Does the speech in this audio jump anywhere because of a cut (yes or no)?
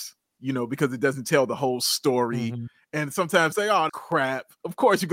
yes